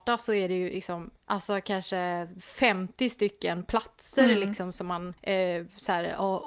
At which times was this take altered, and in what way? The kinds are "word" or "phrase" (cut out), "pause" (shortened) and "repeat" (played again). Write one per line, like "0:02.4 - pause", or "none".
0:05.2 - pause